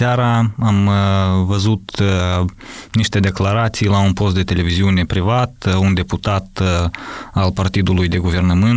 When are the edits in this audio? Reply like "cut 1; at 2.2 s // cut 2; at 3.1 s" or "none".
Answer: none